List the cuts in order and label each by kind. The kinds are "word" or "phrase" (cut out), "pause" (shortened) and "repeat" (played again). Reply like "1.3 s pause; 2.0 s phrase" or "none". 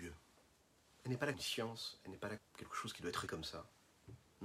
1.3 s word; 2.4 s word; 3.3 s word

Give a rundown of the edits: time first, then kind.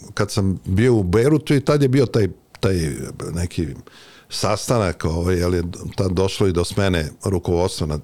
none

